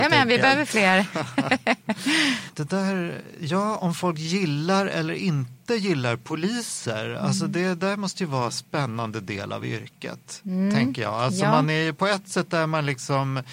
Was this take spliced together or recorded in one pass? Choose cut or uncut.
uncut